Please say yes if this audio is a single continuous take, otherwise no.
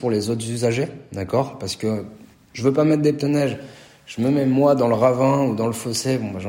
yes